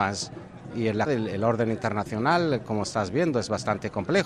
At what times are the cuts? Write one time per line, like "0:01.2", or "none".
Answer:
0:01.1